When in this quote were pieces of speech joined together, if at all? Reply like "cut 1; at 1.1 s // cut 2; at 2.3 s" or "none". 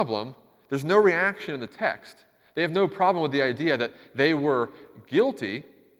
none